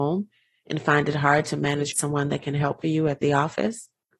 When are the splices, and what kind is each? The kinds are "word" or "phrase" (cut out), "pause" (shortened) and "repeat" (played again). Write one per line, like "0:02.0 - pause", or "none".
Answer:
0:01.9 - phrase
0:02.8 - phrase

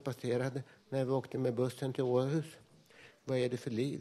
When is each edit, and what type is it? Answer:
none

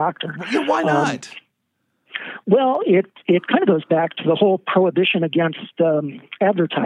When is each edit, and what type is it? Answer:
none

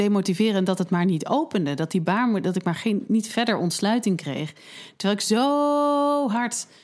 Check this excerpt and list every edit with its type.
none

